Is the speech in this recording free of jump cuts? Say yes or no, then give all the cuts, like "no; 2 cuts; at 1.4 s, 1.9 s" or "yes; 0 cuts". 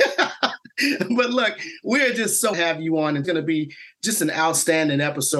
no; 2 cuts; at 2.5 s, 3.2 s